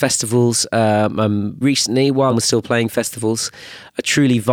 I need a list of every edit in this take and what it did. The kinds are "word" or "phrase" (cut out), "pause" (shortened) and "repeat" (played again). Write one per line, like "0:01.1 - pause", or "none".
0:01.6 - word
0:02.3 - word